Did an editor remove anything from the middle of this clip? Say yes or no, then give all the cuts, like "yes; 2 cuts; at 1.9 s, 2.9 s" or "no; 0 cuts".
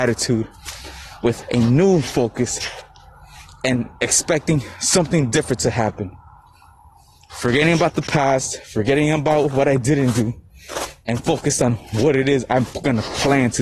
no; 0 cuts